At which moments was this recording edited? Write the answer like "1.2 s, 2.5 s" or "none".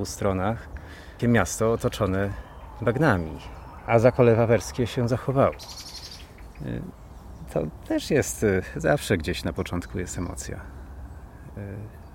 1.2 s